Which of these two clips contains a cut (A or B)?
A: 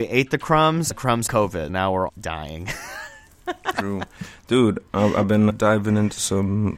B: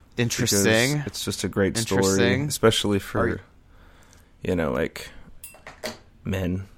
A